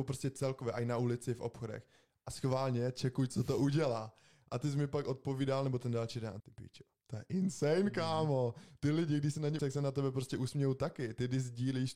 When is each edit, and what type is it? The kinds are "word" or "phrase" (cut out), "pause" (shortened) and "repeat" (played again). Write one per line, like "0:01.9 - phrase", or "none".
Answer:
0:06.4 - word
0:09.6 - word